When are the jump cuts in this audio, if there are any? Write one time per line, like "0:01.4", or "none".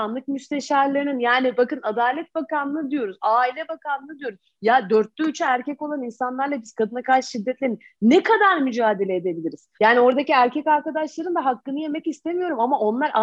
0:09.7